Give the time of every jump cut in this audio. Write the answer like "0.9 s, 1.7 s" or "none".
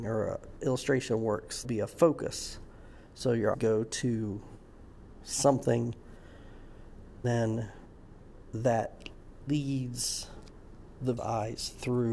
1.6 s, 3.5 s, 7.2 s, 9.5 s, 11.2 s